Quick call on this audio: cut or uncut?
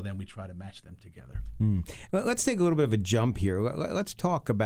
uncut